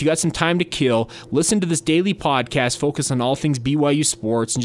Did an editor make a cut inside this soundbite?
no; 0 cuts

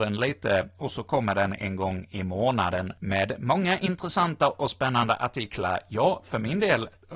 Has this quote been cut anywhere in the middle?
yes; 1 cut; at 3.0 s

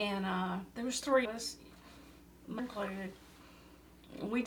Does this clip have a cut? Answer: yes; 2 cuts; at 1.2 s, 2.6 s

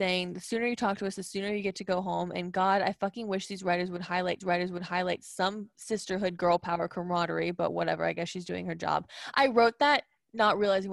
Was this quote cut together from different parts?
yes; 1 cut; at 4.4 s

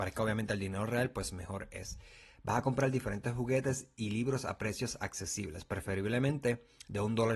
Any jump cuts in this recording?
no; 0 cuts

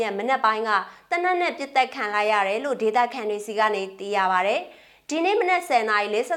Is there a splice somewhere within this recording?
no; 0 cuts

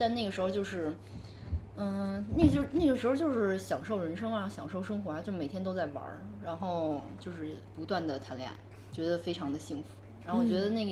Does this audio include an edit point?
yes; 1 cut; at 8.9 s

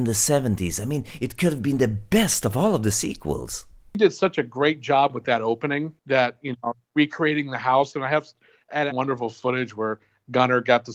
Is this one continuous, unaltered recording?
no; 1 cut; at 8.9 s

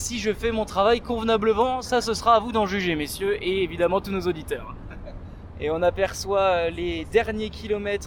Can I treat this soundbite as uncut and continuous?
yes; 0 cuts

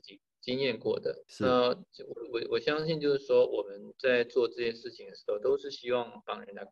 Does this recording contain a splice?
yes; 1 cut; at 1.3 s

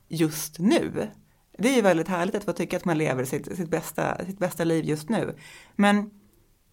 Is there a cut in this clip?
no; 0 cuts

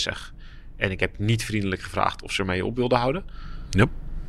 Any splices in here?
no; 0 cuts

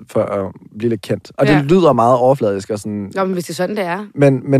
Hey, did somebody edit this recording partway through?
no; 0 cuts

